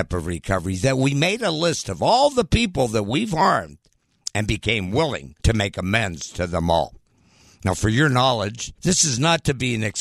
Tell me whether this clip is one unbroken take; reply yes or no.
no